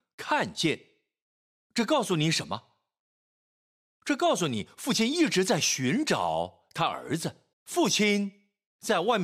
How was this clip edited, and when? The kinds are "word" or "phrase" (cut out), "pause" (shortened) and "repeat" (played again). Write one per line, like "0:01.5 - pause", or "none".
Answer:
0:07.5 - pause